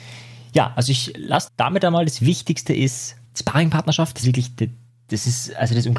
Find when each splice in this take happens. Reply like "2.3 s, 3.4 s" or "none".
1.5 s, 3.2 s, 4.2 s